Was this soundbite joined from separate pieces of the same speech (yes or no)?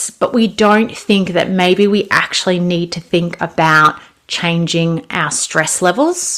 no